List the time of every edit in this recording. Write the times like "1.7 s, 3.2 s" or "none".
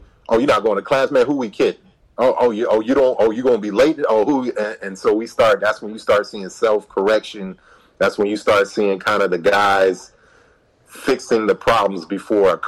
none